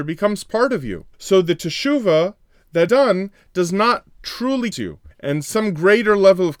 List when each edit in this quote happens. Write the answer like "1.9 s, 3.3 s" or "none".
1.1 s, 2.9 s, 4.7 s, 5.1 s